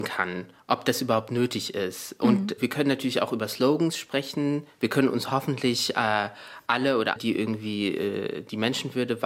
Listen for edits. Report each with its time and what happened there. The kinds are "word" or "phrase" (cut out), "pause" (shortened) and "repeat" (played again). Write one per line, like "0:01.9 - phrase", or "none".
0:07.2 - word